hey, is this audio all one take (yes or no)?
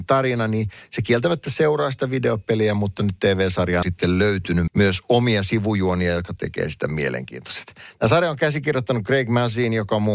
no